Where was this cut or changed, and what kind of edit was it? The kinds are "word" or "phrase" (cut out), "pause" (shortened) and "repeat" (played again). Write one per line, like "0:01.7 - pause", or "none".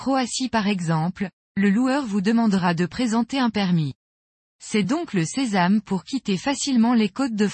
none

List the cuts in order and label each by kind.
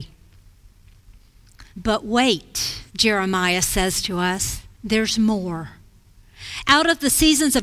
0:01.7 - pause
0:02.9 - pause
0:04.7 - pause

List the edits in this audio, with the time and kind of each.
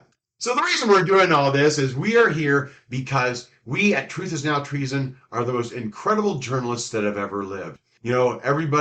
none

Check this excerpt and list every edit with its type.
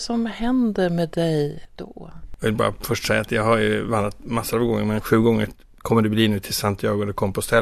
none

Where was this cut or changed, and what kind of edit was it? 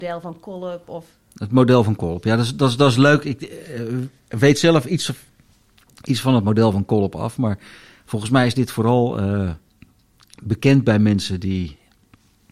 none

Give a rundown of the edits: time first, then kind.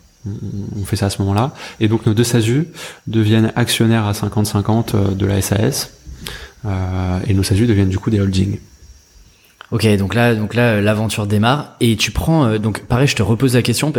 none

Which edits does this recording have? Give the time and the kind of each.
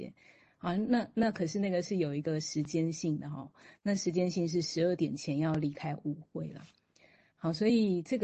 none

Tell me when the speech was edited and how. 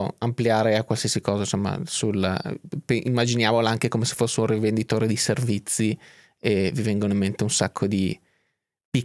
none

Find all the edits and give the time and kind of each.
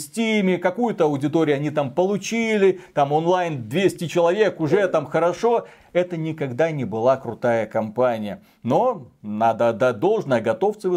none

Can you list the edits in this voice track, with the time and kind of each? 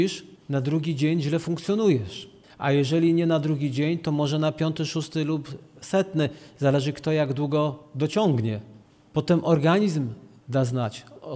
none

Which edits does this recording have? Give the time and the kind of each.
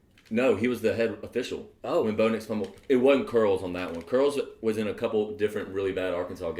none

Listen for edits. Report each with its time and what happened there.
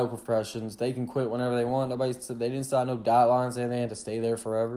none

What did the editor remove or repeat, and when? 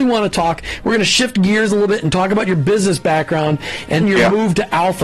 0:04.0 - word

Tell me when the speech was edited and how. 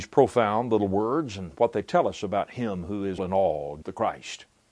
0:03.2 - word
0:03.8 - word

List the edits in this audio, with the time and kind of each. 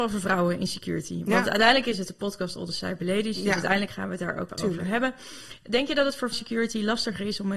0:04.5 - word
0:06.3 - word

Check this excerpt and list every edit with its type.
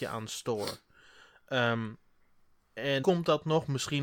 0:03.0 - word

